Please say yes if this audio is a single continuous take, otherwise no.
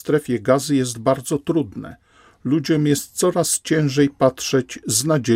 yes